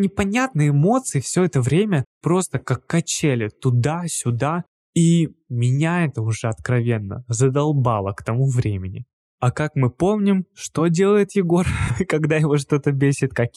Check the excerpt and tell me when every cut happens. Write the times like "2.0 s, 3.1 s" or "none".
none